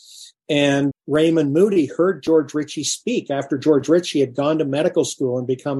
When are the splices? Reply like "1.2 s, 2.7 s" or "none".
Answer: 0.9 s